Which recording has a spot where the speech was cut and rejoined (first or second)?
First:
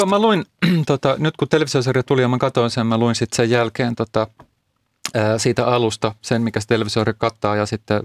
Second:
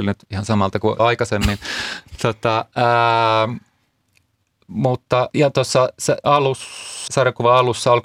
second